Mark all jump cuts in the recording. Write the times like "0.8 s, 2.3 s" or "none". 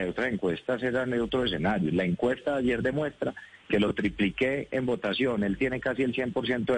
none